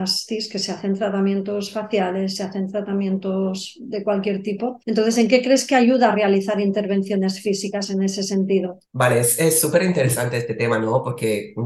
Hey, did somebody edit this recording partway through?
yes; 2 cuts; at 4.8 s, 8.9 s

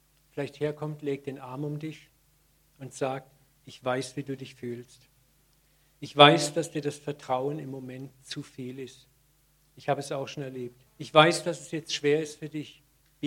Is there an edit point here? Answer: yes; 1 cut; at 10.9 s

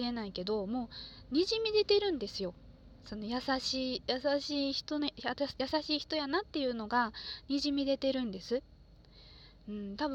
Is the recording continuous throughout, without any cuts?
yes; 0 cuts

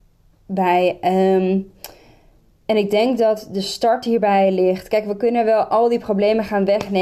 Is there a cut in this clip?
no; 0 cuts

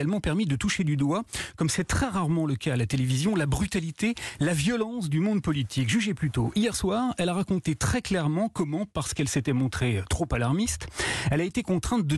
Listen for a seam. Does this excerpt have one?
no; 0 cuts

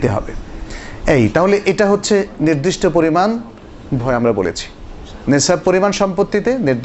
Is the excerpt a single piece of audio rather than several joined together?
no; 1 cut; at 4.0 s

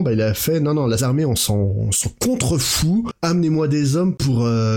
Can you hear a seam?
yes; 1 cut; at 1.0 s

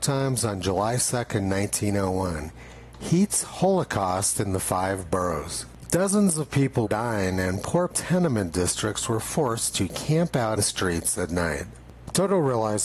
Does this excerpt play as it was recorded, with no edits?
no; 3 cuts; at 6.9 s, 7.9 s, 10.6 s

